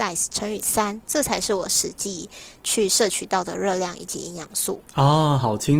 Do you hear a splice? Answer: yes; 1 cut; at 4.8 s

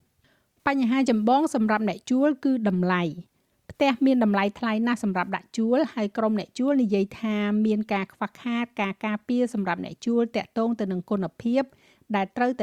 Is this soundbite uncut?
yes; 0 cuts

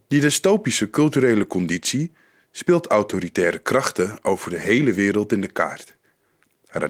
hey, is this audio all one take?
yes; 0 cuts

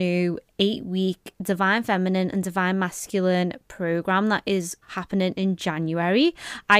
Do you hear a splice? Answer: yes; 1 cut; at 4.8 s

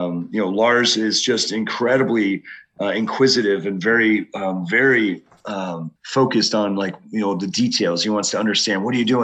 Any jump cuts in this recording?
yes; 1 cut; at 6.0 s

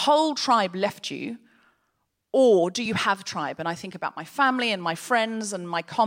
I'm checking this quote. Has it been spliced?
no; 0 cuts

